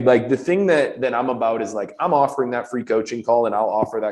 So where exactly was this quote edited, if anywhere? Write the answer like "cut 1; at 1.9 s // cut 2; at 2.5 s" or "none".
none